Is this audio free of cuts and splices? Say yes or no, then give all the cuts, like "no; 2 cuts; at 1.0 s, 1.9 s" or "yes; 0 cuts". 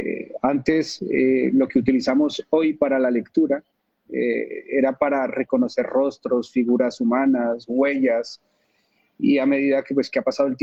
yes; 0 cuts